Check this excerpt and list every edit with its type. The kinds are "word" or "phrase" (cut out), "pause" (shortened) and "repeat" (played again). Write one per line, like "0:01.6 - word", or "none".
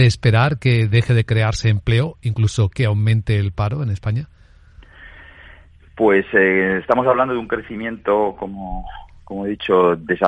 none

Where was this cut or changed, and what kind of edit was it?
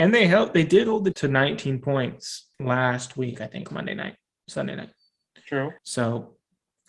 0:01.1 - word
0:02.5 - pause
0:03.7 - word
0:05.8 - pause

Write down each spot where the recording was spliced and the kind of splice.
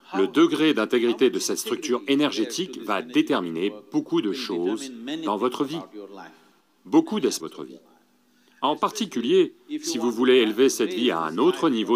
0:07.4 - word

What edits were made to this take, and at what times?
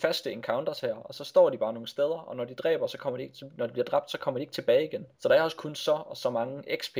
0:05.1 - pause

